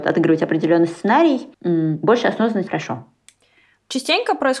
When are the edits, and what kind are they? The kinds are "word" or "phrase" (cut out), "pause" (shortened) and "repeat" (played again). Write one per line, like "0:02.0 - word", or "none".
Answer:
0:01.5 - pause
0:02.7 - word